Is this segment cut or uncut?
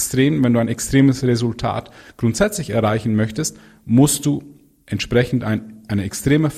uncut